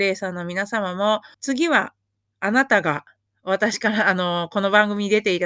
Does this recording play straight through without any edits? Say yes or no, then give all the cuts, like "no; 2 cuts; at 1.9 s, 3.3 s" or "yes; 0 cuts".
no; 1 cut; at 1.3 s